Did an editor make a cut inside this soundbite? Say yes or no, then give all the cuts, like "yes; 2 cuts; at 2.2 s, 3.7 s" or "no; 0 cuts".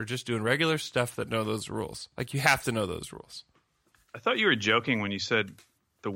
no; 0 cuts